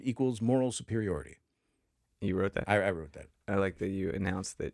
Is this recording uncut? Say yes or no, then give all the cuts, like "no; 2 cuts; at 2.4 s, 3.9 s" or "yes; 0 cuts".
yes; 0 cuts